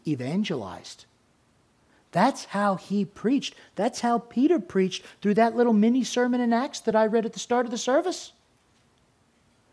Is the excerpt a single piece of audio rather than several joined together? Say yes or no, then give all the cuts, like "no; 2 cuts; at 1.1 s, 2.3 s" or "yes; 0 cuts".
yes; 0 cuts